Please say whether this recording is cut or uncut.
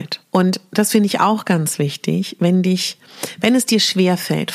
uncut